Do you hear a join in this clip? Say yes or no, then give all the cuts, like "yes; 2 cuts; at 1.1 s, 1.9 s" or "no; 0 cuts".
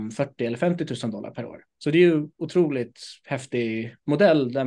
yes; 2 cuts; at 1.7 s, 2.3 s